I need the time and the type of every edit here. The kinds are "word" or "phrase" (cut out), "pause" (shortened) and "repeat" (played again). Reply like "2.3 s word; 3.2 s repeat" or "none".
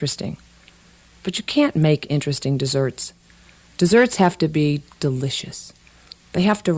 none